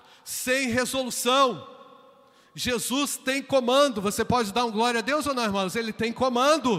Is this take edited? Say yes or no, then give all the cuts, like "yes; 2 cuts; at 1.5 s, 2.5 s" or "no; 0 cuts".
no; 0 cuts